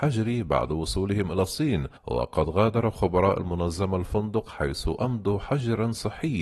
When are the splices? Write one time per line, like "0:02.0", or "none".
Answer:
0:02.0